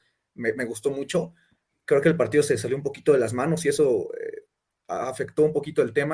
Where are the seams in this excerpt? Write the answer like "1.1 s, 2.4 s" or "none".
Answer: none

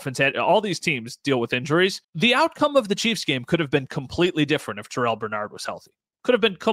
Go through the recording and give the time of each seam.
2.0 s

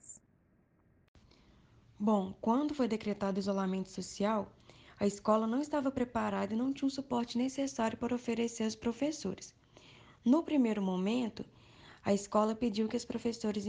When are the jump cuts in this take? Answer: none

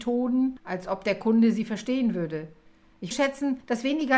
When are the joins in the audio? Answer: 3.1 s

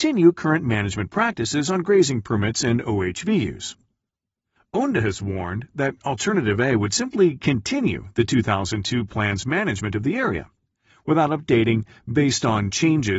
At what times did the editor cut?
none

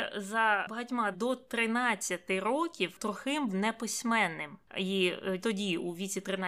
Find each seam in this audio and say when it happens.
1.1 s, 3.5 s, 5.4 s

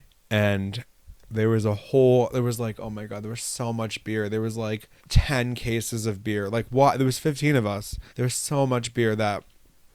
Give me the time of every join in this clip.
1.2 s, 5.0 s, 8.1 s

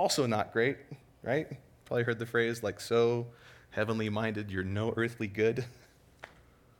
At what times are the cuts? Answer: none

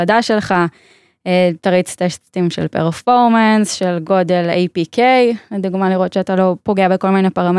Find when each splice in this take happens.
none

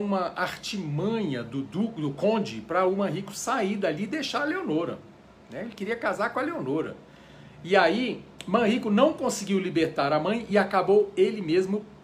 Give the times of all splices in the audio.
none

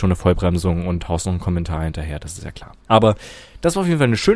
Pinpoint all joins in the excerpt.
none

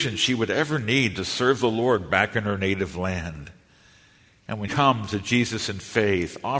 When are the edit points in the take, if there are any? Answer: 4.7 s

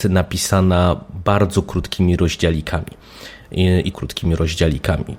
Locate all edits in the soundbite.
3.9 s

